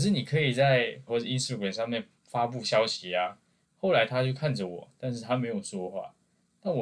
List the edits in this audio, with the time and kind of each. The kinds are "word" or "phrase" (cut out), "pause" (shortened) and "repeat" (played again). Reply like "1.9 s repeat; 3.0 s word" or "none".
1.1 s word; 2.2 s pause; 3.6 s pause